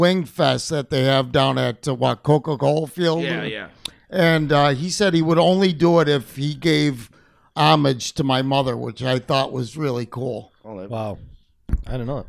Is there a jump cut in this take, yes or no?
no